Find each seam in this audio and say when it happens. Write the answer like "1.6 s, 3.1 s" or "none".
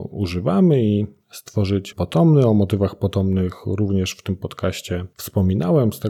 1.9 s